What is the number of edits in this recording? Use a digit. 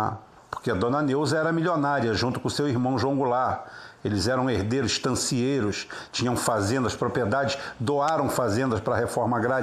0